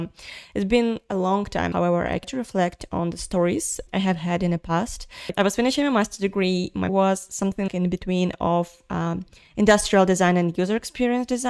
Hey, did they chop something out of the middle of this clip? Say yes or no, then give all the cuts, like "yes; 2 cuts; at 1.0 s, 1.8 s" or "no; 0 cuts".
yes; 6 cuts; at 1.7 s, 2.2 s, 3.9 s, 5.3 s, 6.9 s, 7.7 s